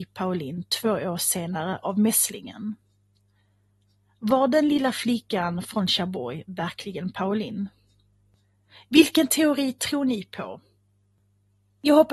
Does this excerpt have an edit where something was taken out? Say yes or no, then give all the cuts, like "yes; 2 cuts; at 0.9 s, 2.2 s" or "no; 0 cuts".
no; 0 cuts